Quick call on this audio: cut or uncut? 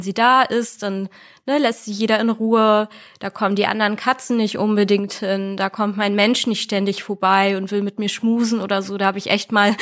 uncut